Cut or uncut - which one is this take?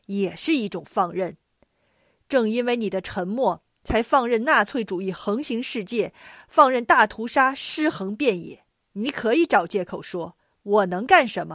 cut